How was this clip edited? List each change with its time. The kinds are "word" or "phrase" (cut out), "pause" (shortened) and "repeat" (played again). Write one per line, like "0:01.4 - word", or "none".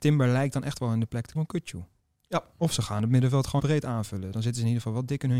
0:01.3 - word
0:02.0 - pause
0:03.6 - word